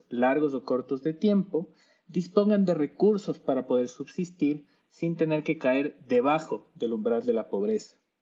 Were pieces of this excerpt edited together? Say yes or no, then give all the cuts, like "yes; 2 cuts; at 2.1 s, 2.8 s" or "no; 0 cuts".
no; 0 cuts